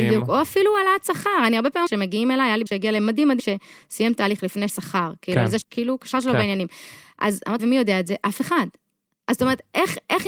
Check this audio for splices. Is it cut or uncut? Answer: cut